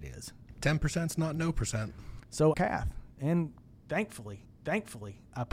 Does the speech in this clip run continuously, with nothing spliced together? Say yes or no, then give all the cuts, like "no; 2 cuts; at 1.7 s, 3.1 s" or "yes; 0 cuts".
no; 2 cuts; at 2.5 s, 4.4 s